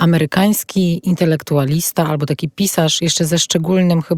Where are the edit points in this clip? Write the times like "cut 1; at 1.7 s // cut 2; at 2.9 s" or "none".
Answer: none